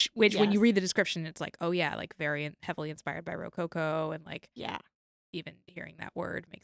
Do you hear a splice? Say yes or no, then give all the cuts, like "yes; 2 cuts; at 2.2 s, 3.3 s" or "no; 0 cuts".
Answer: no; 0 cuts